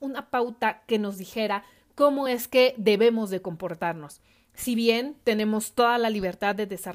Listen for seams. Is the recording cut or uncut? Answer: uncut